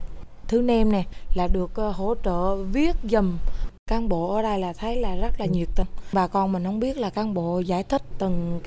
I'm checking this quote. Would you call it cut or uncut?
uncut